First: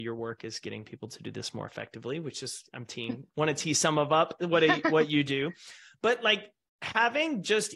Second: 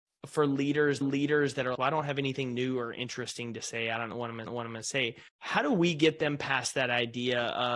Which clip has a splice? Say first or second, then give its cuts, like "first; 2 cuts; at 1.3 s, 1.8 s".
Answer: second; 4 cuts; at 1.0 s, 1.7 s, 4.5 s, 5.3 s